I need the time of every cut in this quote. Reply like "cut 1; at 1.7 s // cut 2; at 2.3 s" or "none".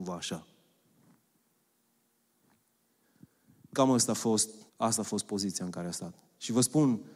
cut 1; at 4.7 s